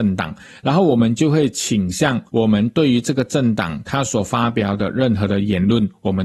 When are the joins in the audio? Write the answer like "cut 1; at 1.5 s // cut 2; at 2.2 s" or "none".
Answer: cut 1; at 2.3 s